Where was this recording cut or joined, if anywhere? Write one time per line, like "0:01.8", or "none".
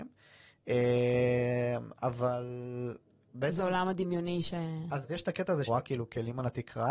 0:05.0
0:05.7